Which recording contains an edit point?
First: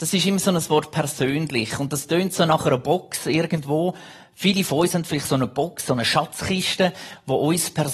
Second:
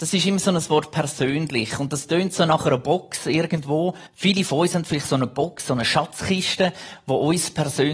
second; 1 cut; at 4.1 s

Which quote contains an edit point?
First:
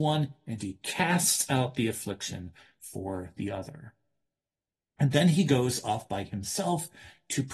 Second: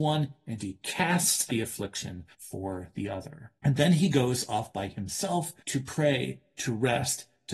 second; 4 cuts; at 1.5 s, 2.3 s, 3.6 s, 5.6 s

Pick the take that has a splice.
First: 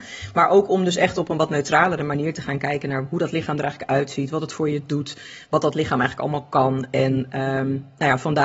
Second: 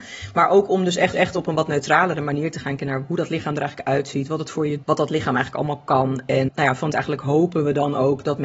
second; 5 cuts; at 1.1 s, 2.8 s, 4.8 s, 6.5 s, 6.9 s

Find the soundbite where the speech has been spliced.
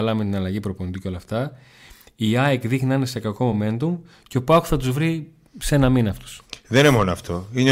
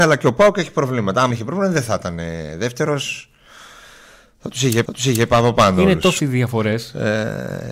second; 3 cuts; at 1.3 s, 4.9 s, 6.2 s

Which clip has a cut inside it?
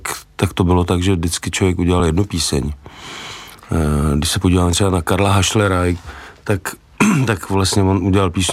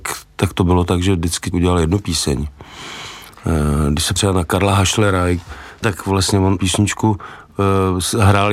second; 4 cuts; at 1.5 s, 4.2 s, 5.8 s, 6.6 s

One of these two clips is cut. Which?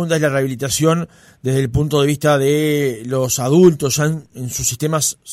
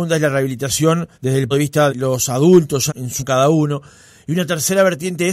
second; 5 cuts; at 1.1 s, 1.5 s, 1.9 s, 2.9 s, 3.2 s

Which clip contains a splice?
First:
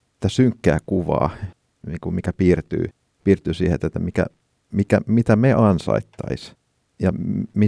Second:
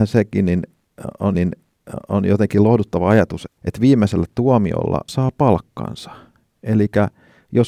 second; 3 cuts; at 1.3 s, 3.5 s, 5.1 s

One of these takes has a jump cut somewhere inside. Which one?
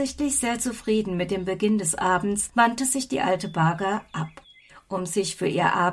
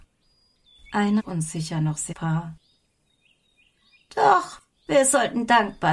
second; 2 cuts; at 1.2 s, 2.1 s

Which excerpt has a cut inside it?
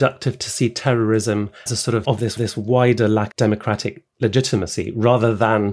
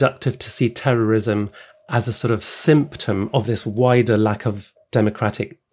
first; 4 cuts; at 1.7 s, 2.0 s, 2.4 s, 3.3 s

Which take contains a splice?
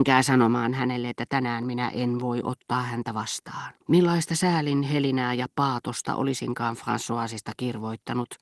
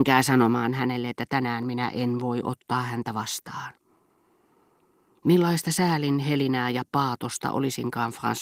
first; 1 cut; at 3.8 s

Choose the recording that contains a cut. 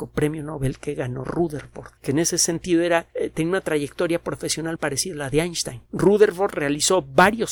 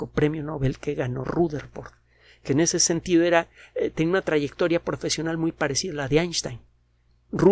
first; 4 cuts; at 2.0 s, 3.1 s, 4.8 s, 5.9 s

